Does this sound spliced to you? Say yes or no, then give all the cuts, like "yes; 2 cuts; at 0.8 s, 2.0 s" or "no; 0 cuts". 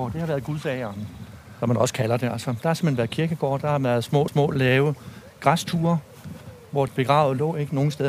yes; 3 cuts; at 1.6 s, 4.3 s, 6.9 s